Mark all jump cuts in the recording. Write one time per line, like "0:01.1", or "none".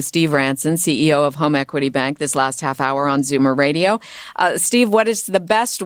none